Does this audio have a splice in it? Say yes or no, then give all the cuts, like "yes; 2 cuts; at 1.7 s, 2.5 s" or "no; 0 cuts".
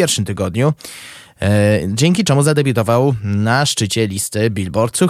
no; 0 cuts